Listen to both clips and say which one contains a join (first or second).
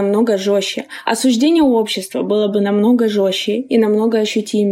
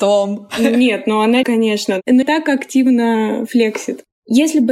second